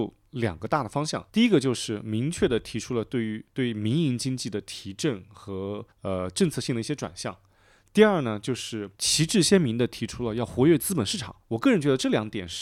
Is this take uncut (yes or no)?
no